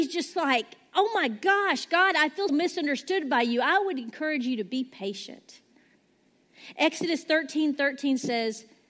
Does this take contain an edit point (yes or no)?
yes